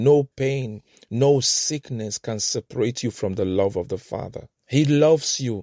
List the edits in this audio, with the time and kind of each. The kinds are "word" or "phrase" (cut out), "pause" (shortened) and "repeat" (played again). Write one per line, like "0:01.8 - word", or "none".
0:04.6 - pause